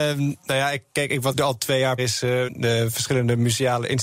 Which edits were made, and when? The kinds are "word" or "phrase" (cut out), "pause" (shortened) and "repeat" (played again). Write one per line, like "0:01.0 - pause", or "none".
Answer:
0:01.3 - word
0:02.0 - word
0:02.5 - word